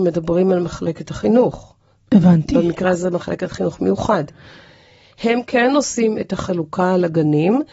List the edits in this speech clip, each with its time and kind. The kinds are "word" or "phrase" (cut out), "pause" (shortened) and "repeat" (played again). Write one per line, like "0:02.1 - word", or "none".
none